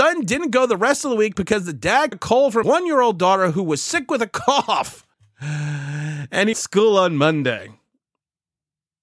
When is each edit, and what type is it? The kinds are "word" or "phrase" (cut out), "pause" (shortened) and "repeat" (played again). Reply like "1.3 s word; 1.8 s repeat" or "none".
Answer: 2.1 s word; 2.6 s word; 5.1 s pause; 6.5 s phrase